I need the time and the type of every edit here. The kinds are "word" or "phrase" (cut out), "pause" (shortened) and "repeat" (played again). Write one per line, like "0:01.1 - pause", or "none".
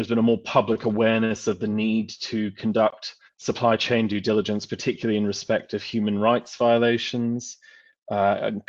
0:03.3 - pause